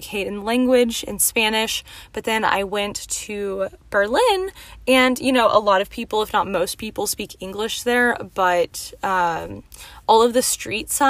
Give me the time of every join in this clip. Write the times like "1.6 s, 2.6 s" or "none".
none